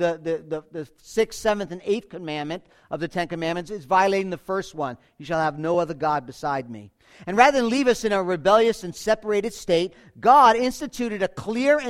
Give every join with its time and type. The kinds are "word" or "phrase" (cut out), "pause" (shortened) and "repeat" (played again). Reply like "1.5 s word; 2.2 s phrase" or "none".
none

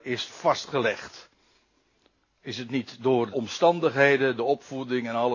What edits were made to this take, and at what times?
3.3 s word

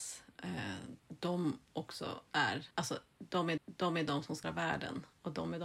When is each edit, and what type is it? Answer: 1.0 s pause; 2.7 s pause; 3.6 s repeat; 4.4 s word

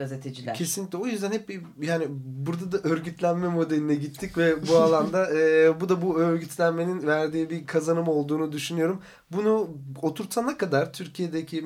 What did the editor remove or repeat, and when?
none

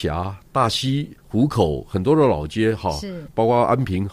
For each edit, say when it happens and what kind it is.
1.2 s pause

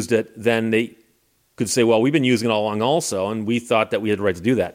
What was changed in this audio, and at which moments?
none

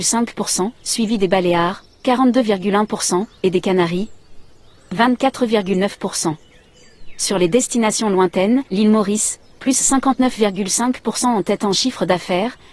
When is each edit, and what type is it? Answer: 2.0 s word; 8.7 s pause

